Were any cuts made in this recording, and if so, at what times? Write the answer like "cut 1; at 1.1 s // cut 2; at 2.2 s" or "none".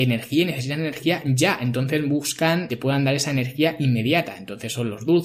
cut 1; at 2.7 s